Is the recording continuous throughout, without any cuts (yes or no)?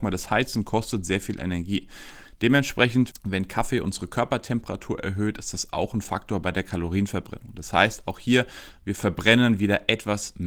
yes